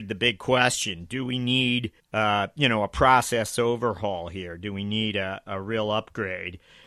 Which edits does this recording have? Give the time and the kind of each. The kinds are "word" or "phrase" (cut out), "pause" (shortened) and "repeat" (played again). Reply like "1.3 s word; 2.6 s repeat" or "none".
2.0 s pause